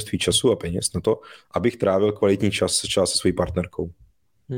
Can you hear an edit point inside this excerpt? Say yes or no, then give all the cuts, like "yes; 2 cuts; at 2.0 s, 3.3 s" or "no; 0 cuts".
no; 0 cuts